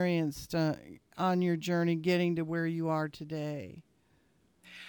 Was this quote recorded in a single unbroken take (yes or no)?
yes